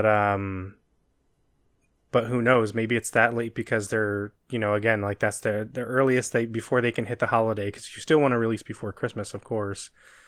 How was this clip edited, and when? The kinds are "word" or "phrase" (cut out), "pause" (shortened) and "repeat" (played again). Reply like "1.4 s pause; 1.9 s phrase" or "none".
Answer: 4.4 s pause